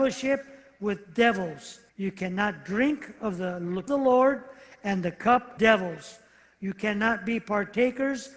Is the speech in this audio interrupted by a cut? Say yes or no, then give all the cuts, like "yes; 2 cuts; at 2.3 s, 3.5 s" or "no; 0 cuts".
yes; 3 cuts; at 1.9 s, 3.9 s, 5.6 s